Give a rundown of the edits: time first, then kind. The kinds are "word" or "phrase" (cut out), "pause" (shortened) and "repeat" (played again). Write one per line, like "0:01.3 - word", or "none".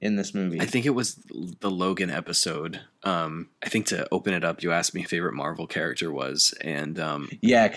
0:03.6 - pause
0:05.1 - word